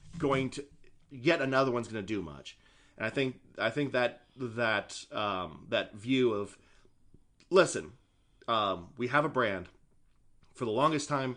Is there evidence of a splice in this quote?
no; 0 cuts

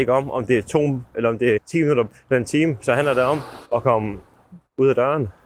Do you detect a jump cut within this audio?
yes; 3 cuts; at 1.1 s, 1.6 s, 3.6 s

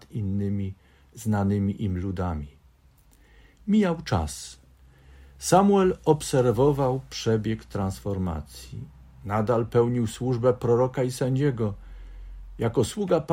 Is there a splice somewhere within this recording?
no; 0 cuts

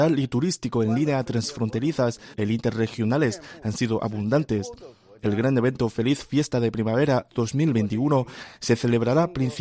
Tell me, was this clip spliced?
no; 0 cuts

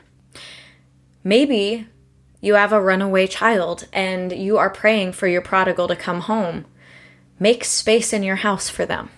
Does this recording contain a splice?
no; 0 cuts

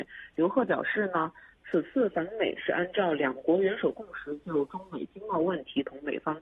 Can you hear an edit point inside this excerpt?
no; 0 cuts

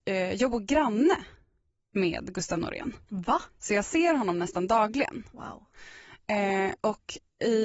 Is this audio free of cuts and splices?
yes; 0 cuts

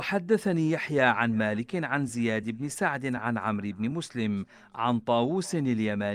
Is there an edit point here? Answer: no; 0 cuts

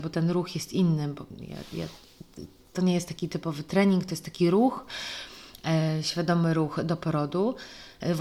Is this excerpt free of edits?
yes; 0 cuts

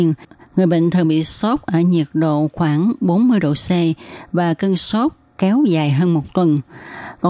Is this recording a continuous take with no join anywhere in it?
yes; 0 cuts

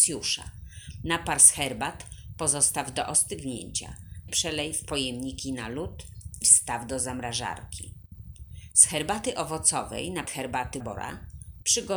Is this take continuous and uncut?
no; 4 cuts; at 4.3 s, 6.4 s, 10.2 s, 10.8 s

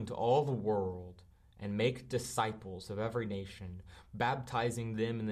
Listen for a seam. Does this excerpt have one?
no; 0 cuts

